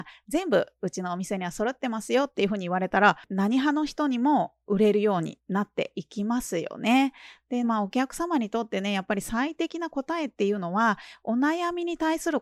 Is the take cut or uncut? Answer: cut